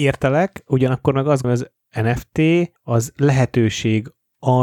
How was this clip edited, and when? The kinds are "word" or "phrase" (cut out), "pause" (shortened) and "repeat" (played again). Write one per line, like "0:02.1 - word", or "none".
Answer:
0:01.4 - word
0:02.8 - pause